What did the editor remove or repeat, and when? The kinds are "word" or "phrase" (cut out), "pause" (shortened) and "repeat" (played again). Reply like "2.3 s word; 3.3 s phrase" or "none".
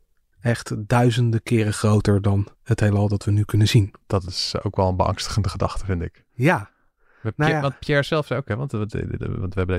2.5 s pause; 4.0 s pause; 6.3 s pause